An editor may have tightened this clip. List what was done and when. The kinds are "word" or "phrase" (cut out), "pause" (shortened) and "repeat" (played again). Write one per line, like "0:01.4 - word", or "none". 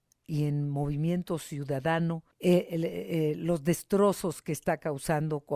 0:02.3 - pause